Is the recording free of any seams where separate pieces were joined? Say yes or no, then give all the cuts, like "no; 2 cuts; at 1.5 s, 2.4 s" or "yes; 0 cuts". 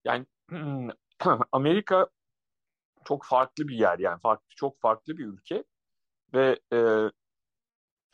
yes; 0 cuts